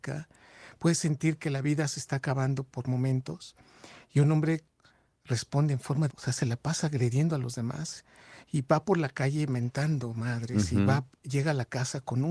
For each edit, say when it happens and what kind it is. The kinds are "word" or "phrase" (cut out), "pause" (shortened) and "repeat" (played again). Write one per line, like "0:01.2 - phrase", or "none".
0:06.1 - word